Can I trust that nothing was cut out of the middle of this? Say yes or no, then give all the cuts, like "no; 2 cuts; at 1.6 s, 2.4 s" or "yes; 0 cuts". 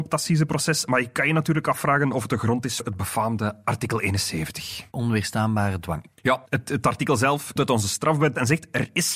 no; 3 cuts; at 2.8 s, 6.5 s, 7.6 s